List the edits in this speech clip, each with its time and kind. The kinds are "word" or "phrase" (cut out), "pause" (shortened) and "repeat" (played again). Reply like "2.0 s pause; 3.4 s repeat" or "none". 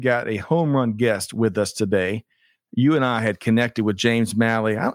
none